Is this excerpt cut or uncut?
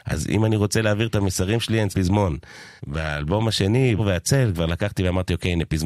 cut